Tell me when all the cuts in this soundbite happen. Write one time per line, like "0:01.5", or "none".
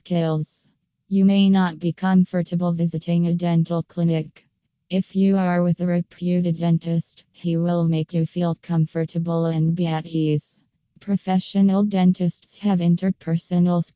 none